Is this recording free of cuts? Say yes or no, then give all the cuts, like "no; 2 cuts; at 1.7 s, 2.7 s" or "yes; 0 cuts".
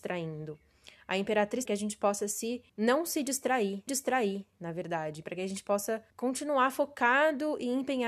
no; 4 cuts; at 1.7 s, 2.7 s, 3.9 s, 6.1 s